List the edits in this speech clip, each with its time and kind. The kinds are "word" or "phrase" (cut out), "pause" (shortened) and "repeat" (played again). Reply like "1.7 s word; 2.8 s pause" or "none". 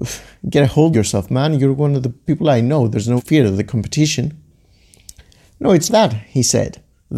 0.9 s word; 2.3 s word; 3.2 s word; 5.9 s word